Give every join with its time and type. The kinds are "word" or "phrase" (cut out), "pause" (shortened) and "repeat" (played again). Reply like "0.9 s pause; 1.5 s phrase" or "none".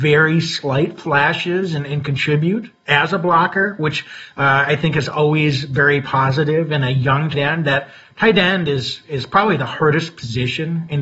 7.3 s word

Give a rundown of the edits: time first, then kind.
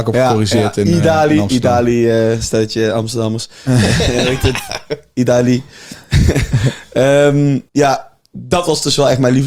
7.7 s pause

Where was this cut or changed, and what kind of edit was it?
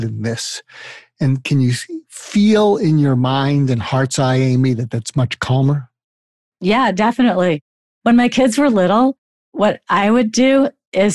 none

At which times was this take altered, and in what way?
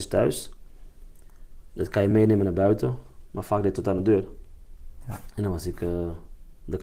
none

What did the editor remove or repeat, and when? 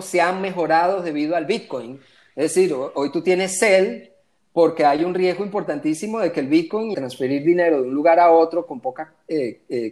6.9 s phrase

